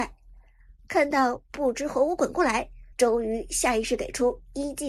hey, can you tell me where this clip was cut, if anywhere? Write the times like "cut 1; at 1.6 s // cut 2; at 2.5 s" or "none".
cut 1; at 2.9 s